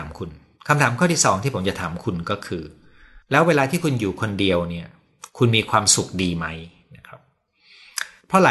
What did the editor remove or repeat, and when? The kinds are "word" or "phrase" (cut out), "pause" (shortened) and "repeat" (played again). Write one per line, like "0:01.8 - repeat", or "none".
0:03.2 - pause